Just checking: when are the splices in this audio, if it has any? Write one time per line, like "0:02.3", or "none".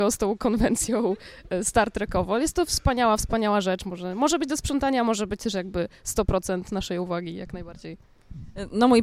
none